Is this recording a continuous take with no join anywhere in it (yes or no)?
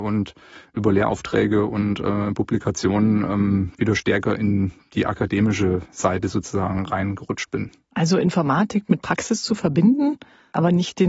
yes